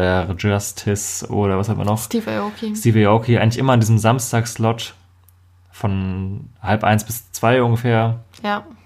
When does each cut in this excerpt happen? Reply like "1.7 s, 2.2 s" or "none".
none